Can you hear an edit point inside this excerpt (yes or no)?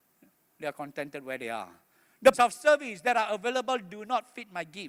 yes